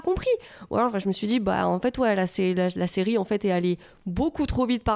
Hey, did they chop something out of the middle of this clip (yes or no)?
no